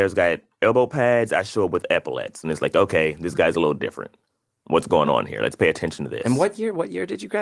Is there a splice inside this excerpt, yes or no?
no